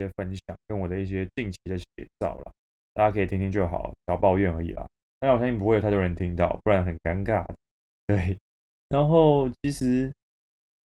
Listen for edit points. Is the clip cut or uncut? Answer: uncut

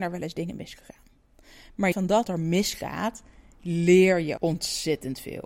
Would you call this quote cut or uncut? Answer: cut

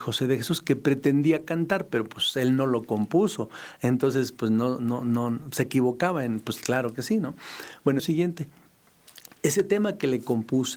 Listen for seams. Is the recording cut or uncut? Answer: cut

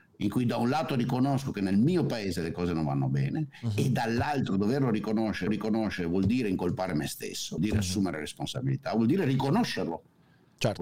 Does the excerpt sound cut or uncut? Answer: cut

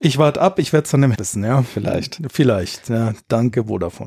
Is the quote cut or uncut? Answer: cut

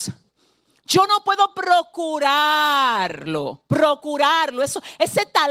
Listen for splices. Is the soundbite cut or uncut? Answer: uncut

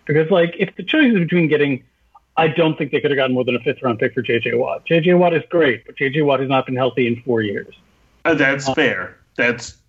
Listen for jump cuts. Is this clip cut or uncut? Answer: uncut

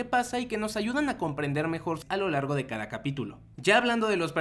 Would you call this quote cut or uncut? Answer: cut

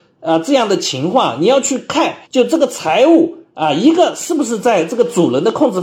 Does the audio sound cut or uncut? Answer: cut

